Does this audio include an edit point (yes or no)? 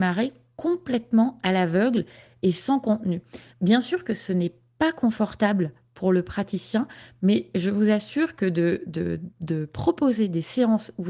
no